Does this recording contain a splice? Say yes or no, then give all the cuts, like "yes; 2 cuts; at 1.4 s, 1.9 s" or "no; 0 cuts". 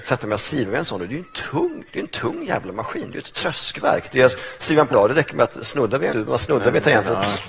yes; 3 cuts; at 1.9 s, 4.9 s, 6.1 s